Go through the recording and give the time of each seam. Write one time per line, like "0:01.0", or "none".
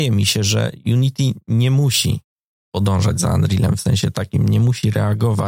none